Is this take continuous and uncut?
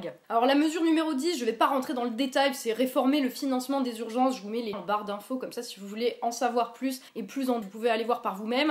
no; 3 cuts; at 4.7 s, 7.1 s, 7.6 s

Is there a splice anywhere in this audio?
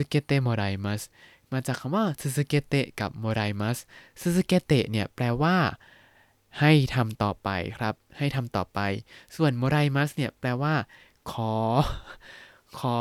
no; 0 cuts

